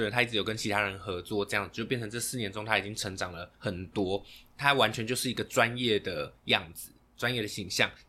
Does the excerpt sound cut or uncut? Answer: cut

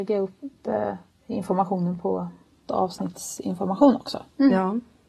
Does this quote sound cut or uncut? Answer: cut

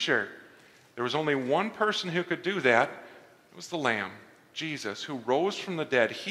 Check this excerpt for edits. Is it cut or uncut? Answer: uncut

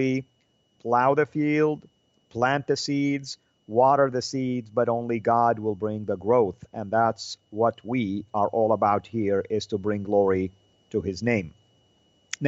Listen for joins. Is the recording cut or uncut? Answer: uncut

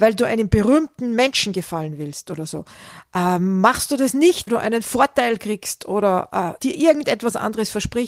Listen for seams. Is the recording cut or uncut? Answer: cut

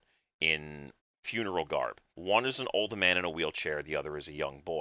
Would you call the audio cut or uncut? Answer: cut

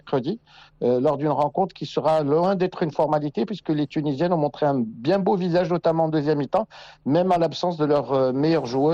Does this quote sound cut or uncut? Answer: uncut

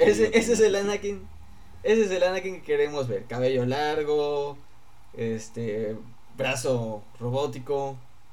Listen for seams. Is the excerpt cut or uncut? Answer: uncut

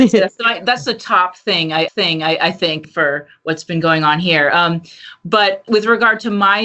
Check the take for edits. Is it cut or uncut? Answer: cut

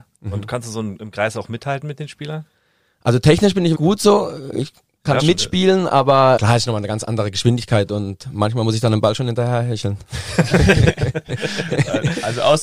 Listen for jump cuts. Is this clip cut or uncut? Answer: cut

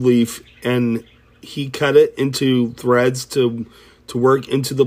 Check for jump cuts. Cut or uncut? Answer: uncut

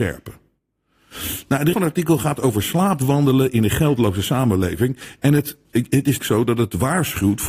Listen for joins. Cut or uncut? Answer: cut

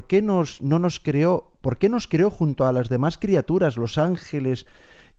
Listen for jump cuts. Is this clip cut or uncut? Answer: uncut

